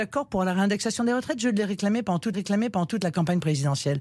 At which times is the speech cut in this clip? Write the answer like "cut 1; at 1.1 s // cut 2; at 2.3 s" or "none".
cut 1; at 2.3 s